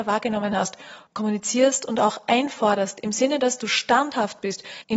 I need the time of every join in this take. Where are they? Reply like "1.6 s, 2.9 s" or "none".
none